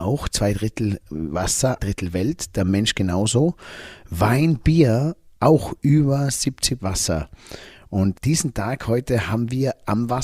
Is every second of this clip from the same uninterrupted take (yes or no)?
no